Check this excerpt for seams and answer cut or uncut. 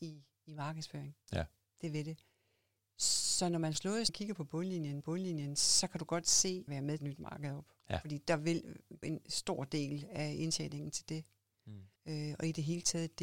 cut